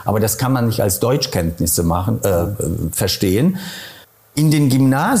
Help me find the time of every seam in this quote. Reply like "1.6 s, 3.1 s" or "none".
4.0 s